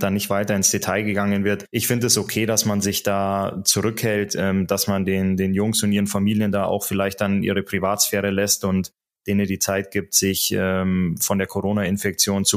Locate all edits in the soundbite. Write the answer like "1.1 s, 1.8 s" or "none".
none